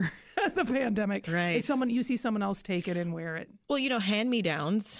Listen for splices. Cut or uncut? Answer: uncut